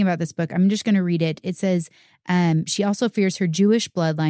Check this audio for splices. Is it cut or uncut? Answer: uncut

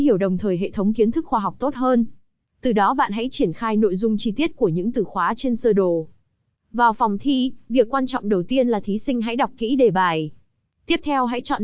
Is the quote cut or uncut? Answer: uncut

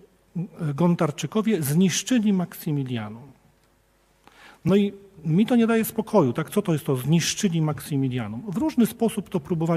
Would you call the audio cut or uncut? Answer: uncut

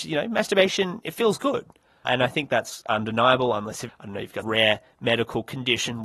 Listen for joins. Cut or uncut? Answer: cut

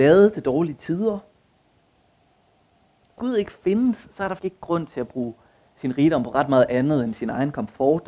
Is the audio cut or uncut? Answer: cut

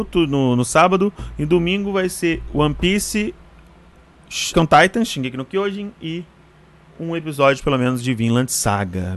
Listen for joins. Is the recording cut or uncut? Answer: cut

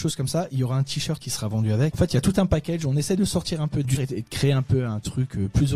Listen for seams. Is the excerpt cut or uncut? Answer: cut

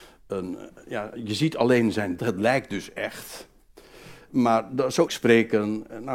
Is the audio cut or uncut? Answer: cut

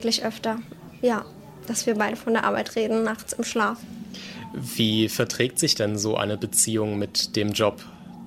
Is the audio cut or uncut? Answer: uncut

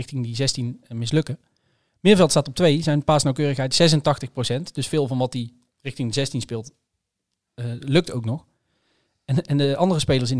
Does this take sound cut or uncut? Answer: uncut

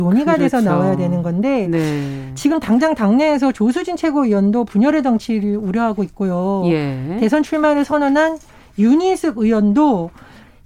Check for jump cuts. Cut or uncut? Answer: uncut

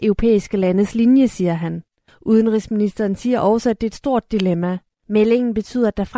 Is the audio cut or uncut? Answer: uncut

